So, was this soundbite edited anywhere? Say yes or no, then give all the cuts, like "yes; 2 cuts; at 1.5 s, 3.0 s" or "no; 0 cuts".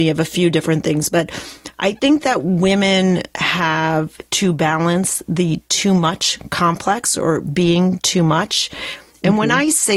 no; 0 cuts